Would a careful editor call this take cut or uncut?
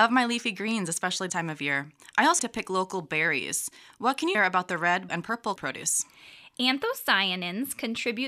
cut